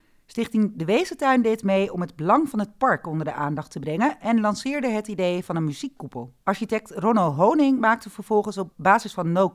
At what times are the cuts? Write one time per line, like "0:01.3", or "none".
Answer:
0:06.4